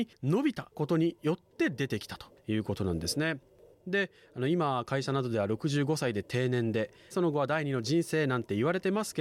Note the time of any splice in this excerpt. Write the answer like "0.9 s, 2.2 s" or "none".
7.1 s